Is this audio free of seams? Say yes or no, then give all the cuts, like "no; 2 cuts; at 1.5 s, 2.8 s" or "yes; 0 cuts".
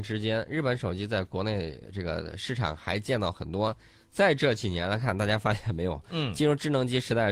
yes; 0 cuts